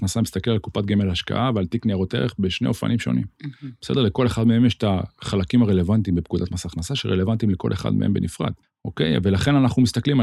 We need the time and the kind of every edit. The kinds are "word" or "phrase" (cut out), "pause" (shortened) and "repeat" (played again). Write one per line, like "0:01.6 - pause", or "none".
0:08.6 - pause